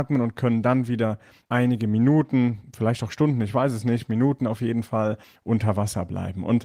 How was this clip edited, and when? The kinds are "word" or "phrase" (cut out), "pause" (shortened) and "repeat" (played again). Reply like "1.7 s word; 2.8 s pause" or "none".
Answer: none